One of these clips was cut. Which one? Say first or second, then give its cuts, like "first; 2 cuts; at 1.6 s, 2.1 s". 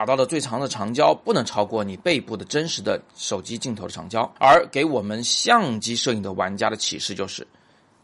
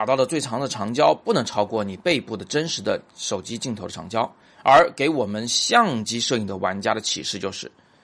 first; 1 cut; at 4.4 s